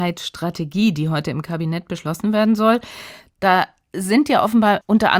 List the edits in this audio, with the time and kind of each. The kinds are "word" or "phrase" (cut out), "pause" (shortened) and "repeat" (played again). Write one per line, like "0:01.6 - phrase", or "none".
none